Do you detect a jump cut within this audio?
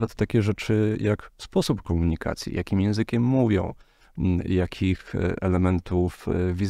no; 0 cuts

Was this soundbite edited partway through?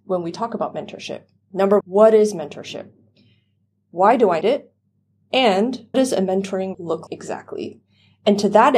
yes; 5 cuts; at 1.8 s, 4.4 s, 5.9 s, 6.7 s, 7.1 s

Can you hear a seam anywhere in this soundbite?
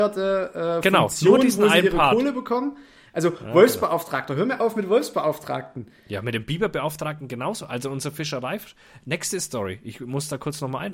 no; 0 cuts

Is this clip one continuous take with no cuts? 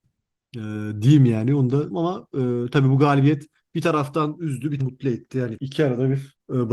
no; 4 cuts; at 1.9 s, 3.6 s, 4.8 s, 5.6 s

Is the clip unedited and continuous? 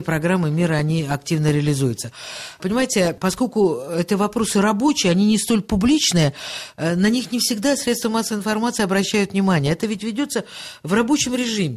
yes; 0 cuts

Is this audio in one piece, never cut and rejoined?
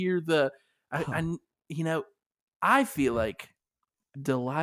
yes; 0 cuts

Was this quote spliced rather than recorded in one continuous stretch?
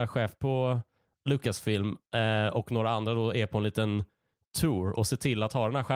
no; 0 cuts

